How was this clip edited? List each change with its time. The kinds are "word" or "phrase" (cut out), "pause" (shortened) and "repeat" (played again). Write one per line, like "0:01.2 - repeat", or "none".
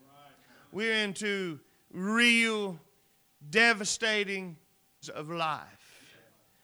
0:05.0 - word

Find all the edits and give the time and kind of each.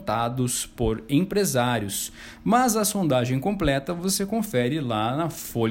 none

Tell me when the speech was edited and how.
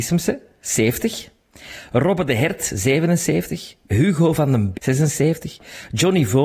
0:04.7 - word

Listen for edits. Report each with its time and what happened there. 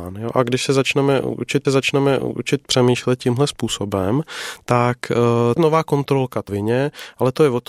0:01.6 - repeat
0:05.6 - phrase
0:06.5 - phrase

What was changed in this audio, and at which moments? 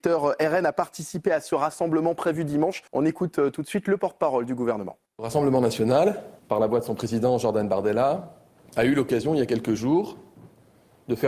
0:02.9 - pause
0:05.1 - pause
0:06.4 - pause
0:08.5 - pause

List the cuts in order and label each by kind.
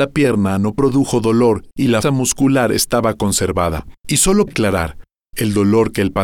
0:01.7 - pause
0:02.0 - word
0:04.0 - pause
0:04.5 - word

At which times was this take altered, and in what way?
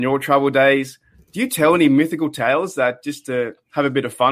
none

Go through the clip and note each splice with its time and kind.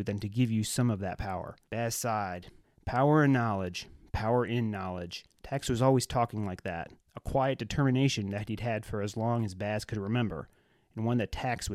0:01.6 - pause
0:02.6 - pause
0:05.3 - pause
0:07.1 - pause

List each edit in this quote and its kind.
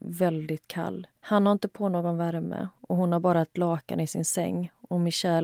0:01.2 - pause

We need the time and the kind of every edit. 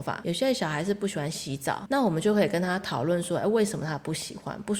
0:01.9 - word

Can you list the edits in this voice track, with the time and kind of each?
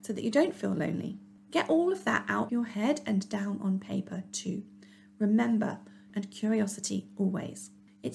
0:02.5 - word
0:06.1 - word

